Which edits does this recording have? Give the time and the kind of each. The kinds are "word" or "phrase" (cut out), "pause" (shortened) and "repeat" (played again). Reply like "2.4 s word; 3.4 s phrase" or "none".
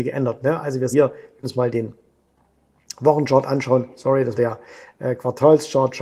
0.9 s word; 1.4 s word; 4.3 s word